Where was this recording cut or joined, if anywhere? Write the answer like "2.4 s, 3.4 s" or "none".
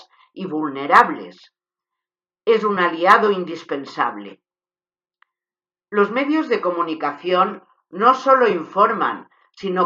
none